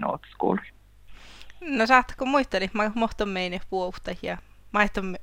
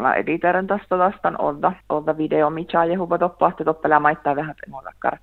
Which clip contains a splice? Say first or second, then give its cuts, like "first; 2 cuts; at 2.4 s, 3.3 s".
second; 1 cut; at 1.8 s